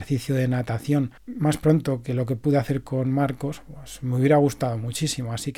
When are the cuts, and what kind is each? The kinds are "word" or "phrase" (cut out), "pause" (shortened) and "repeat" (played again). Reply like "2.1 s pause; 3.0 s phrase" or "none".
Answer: none